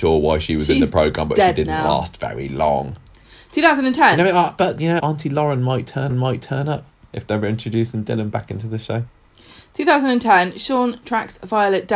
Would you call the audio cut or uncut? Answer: cut